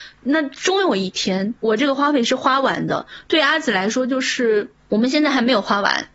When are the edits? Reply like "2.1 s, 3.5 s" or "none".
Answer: 4.8 s